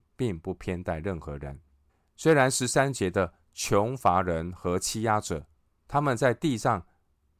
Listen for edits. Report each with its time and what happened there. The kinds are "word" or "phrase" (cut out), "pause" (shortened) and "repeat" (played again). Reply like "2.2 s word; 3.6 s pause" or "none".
1.9 s pause; 5.6 s pause